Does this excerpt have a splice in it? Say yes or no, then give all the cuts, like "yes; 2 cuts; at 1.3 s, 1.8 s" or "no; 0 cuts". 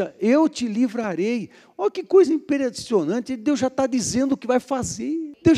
no; 0 cuts